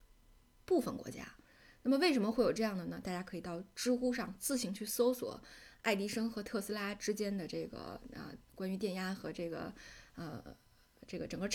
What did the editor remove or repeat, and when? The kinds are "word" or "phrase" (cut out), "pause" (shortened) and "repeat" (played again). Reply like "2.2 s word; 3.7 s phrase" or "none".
none